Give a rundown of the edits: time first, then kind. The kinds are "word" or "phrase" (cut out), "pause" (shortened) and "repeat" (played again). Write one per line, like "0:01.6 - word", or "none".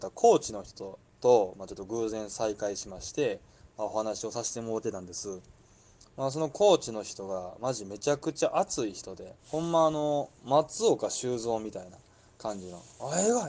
0:01.1 - pause
0:09.4 - pause